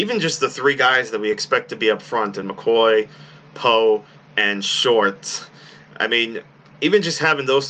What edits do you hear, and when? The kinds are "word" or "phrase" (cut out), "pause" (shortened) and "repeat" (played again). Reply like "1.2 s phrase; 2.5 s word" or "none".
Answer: none